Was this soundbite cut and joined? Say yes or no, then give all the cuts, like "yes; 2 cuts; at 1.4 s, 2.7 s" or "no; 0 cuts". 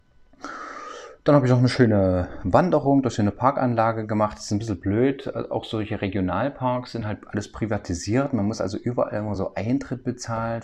no; 0 cuts